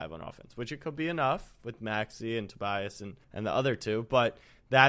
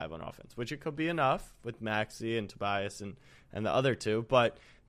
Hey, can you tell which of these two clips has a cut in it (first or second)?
first